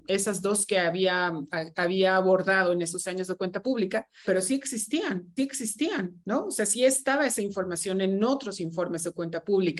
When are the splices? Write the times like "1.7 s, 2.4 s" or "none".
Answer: 4.2 s, 5.4 s